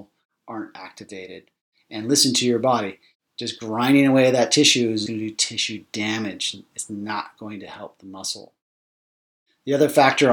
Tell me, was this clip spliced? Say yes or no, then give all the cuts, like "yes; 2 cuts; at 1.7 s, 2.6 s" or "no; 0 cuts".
yes; 1 cut; at 5.1 s